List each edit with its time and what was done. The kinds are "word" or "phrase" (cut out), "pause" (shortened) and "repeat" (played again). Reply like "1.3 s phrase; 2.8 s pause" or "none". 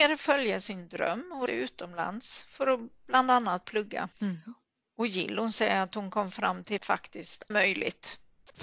1.5 s word; 4.1 s pause; 6.8 s word; 7.5 s phrase